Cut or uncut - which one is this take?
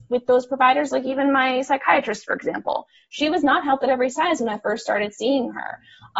uncut